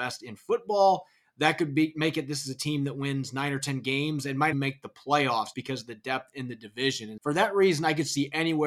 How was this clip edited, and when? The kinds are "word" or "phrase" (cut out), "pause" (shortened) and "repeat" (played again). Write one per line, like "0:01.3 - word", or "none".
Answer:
0:04.5 - word
0:05.5 - word
0:07.2 - word